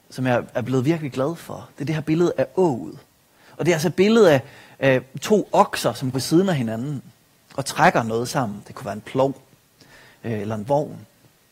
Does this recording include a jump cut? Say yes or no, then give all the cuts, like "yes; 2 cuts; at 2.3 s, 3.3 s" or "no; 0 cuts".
yes; 1 cut; at 6.1 s